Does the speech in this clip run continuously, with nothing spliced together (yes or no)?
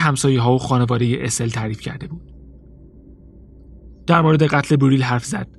yes